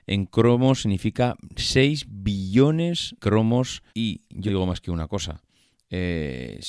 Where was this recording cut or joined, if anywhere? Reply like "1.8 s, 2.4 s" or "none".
3.2 s, 3.9 s, 4.5 s